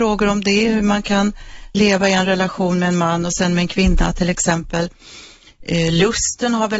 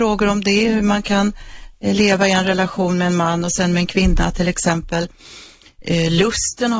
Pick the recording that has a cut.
first; 1 cut; at 1.7 s

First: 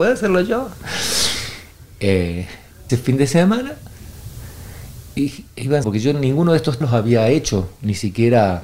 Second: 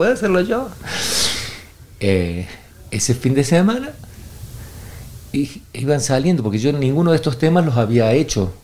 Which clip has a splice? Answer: first; 3 cuts; at 2.9 s, 5.8 s, 6.8 s

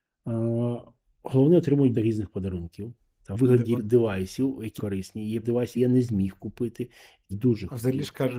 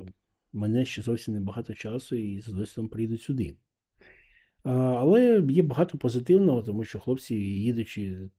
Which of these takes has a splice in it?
first; 7 cuts; at 1.9 s, 3.3 s, 3.8 s, 4.8 s, 5.4 s, 5.8 s, 7.3 s

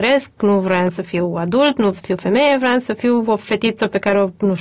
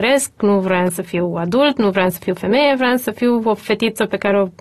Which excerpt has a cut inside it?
first; 1 cut; at 1.9 s

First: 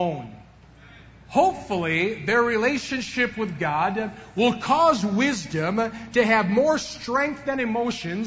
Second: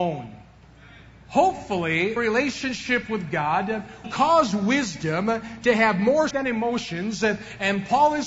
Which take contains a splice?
second; 3 cuts; at 2.2 s, 4.0 s, 6.3 s

